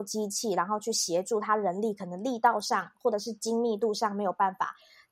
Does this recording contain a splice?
no; 0 cuts

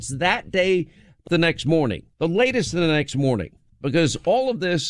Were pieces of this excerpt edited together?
yes; 3 cuts; at 1.3 s, 2.1 s, 3.7 s

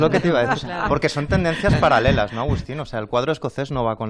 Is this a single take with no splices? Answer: yes; 0 cuts

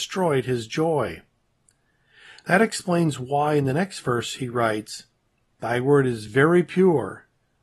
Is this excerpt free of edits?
yes; 0 cuts

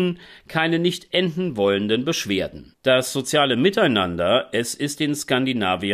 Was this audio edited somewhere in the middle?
no; 0 cuts

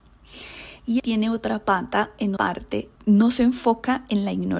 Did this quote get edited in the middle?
yes; 3 cuts; at 1.0 s, 2.4 s, 3.0 s

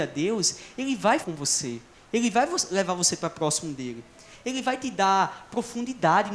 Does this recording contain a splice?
yes; 2 cuts; at 1.2 s, 1.9 s

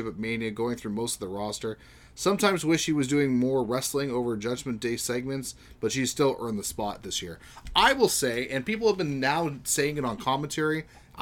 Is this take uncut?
yes; 0 cuts

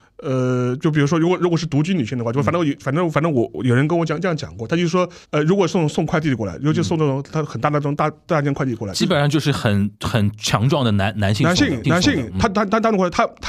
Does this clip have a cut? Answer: yes; 3 cuts; at 5.2 s, 9.9 s, 11.8 s

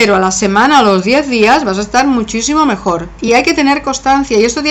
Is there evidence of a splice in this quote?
no; 0 cuts

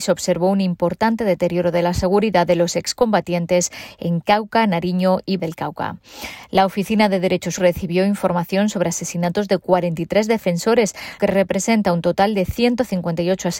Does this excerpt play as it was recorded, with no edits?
no; 3 cuts; at 5.4 s, 7.6 s, 11.2 s

